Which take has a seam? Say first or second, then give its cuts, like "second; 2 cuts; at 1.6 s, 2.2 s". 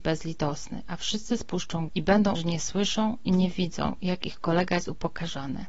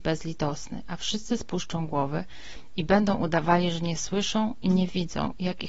first; 2 cuts; at 1.9 s, 2.4 s